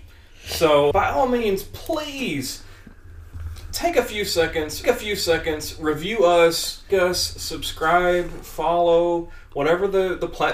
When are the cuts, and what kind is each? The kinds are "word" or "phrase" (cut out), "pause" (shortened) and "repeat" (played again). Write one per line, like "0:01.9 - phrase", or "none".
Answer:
0:00.9 - word
0:04.8 - repeat
0:06.9 - word